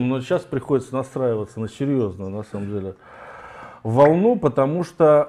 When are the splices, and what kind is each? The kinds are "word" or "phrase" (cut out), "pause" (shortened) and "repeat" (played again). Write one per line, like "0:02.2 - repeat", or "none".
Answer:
none